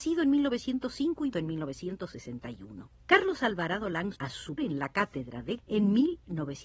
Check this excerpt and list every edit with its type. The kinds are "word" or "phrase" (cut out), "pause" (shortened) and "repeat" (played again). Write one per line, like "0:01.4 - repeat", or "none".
0:01.3 - word
0:03.0 - pause
0:04.1 - word
0:04.6 - word
0:05.6 - word